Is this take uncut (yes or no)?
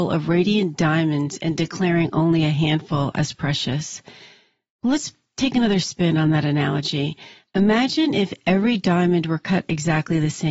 yes